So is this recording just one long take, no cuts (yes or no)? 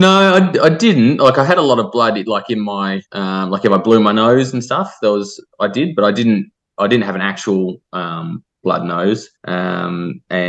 no